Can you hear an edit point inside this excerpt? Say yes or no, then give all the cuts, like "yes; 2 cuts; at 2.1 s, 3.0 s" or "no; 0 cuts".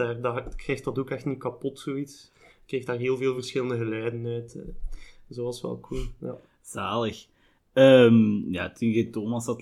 no; 0 cuts